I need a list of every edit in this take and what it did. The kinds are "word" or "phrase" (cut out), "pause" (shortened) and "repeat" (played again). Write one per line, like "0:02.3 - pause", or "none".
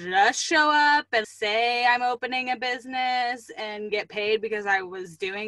0:01.2 - word
0:03.9 - phrase